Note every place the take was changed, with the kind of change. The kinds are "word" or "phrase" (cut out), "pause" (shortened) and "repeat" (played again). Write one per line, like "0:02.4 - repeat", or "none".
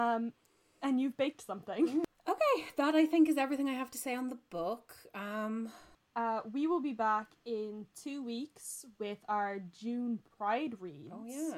none